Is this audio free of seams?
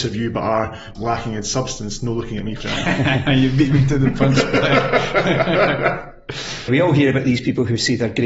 no; 3 cuts; at 0.9 s, 2.6 s, 6.7 s

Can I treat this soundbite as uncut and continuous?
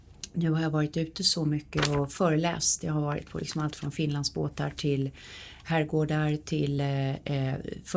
yes; 0 cuts

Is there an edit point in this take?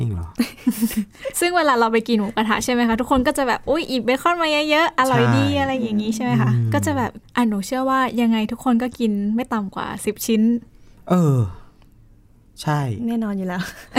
yes; 1 cut; at 7.2 s

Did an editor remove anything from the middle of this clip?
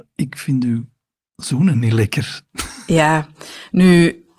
no; 0 cuts

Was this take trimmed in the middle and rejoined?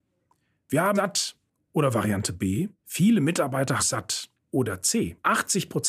yes; 3 cuts; at 1.0 s, 2.8 s, 3.8 s

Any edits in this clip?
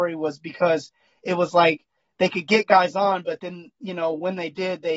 no; 0 cuts

